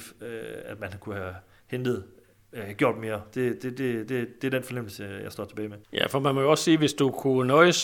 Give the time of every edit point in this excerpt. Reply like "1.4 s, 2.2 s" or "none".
5.8 s